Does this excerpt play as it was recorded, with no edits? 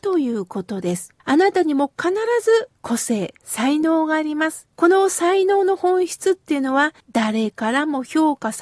no; 4 cuts; at 1.2 s, 2.8 s, 4.7 s, 7.0 s

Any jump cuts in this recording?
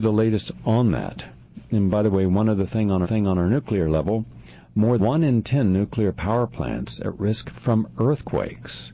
yes; 2 cuts; at 3.0 s, 5.0 s

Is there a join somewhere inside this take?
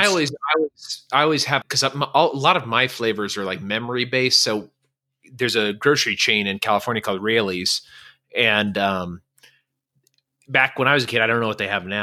yes; 1 cut; at 1.6 s

